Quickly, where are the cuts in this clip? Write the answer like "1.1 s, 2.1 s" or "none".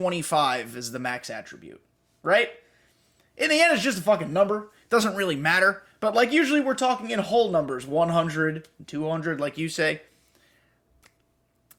none